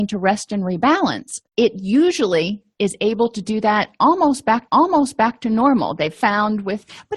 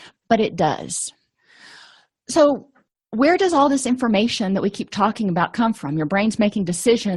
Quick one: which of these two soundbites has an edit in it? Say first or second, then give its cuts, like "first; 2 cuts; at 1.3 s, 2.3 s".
first; 2 cuts; at 1.5 s, 4.7 s